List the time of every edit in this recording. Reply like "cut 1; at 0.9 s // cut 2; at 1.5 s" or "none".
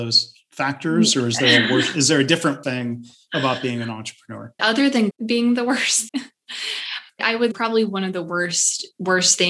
cut 1; at 2.6 s // cut 2; at 4.6 s // cut 3; at 5.1 s // cut 4; at 6.1 s // cut 5; at 7.2 s // cut 6; at 7.5 s